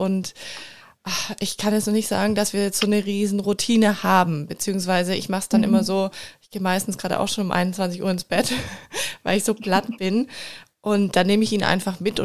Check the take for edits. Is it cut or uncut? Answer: uncut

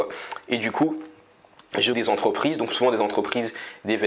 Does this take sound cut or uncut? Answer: cut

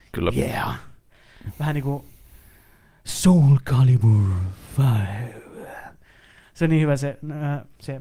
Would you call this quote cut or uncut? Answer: uncut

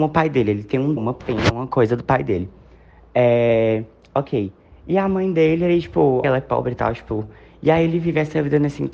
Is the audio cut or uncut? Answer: cut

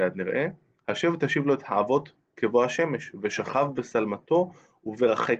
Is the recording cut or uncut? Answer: uncut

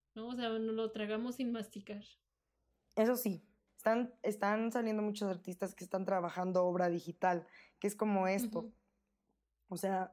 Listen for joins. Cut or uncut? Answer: uncut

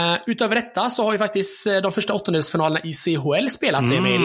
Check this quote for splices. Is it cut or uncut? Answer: uncut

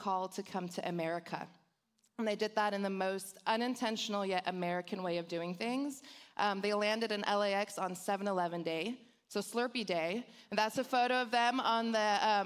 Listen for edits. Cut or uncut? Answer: uncut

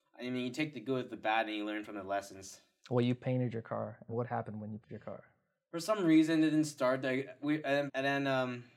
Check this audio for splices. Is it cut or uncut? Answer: cut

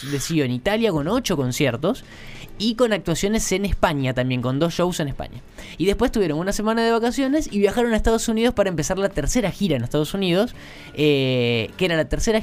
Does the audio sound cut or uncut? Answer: uncut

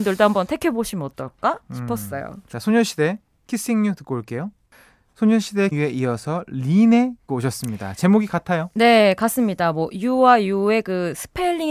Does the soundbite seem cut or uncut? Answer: cut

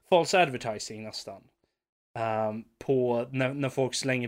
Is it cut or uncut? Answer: uncut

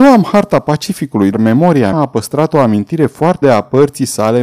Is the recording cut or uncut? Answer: cut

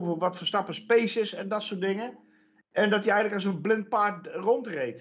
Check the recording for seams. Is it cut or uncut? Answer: uncut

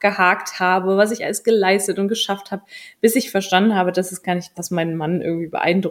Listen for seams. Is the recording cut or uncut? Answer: cut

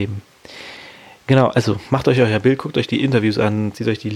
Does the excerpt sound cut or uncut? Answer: uncut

